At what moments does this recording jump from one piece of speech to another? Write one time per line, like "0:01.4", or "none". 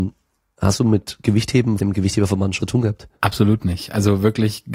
0:01.8
0:02.6
0:03.2